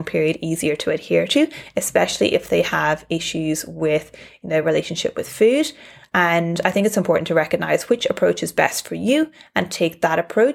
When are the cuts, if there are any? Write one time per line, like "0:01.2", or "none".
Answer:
none